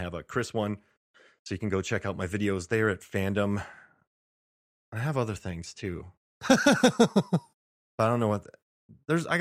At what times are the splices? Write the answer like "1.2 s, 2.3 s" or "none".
none